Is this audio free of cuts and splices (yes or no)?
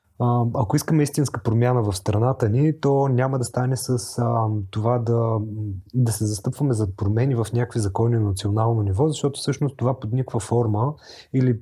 yes